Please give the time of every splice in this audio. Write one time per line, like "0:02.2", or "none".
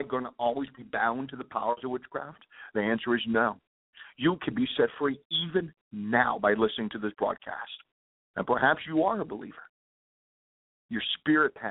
none